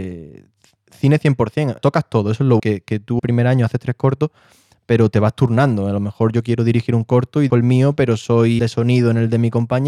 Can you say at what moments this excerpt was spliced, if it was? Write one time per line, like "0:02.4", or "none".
0:01.8
0:02.6
0:03.2
0:07.5
0:08.6